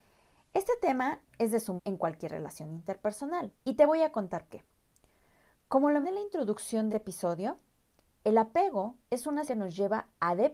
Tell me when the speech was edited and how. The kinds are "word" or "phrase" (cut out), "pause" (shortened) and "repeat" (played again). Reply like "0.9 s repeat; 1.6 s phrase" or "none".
1.3 s pause; 1.8 s word; 3.5 s pause; 4.5 s word; 6.0 s word; 6.9 s word; 9.0 s pause; 9.5 s word

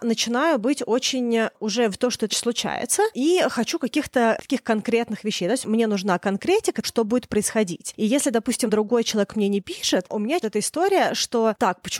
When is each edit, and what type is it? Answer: 1.9 s word; 2.3 s word; 6.8 s word; 8.7 s word; 10.1 s word; 10.4 s phrase

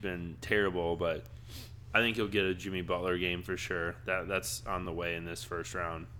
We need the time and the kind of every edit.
none

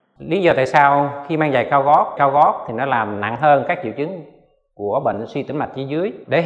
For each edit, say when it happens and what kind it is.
2.2 s repeat

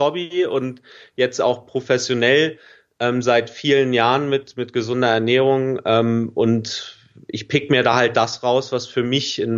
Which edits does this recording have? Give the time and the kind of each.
none

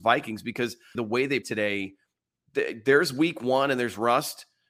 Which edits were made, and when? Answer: 1.0 s word; 1.4 s word

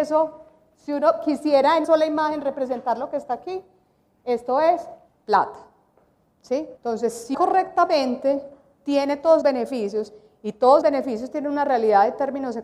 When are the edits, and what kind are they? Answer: 1.8 s word; 5.1 s pause; 6.8 s pause; 7.3 s word; 9.4 s word; 10.8 s word

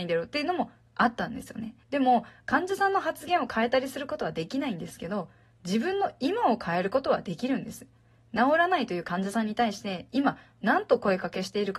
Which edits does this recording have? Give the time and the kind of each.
1.8 s pause

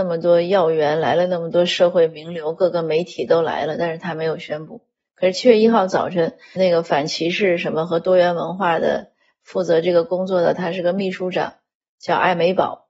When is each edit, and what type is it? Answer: 6.6 s word

